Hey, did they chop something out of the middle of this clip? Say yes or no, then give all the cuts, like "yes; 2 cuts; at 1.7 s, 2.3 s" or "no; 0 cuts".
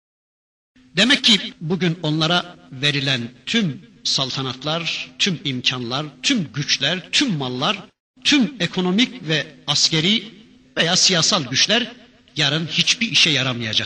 no; 0 cuts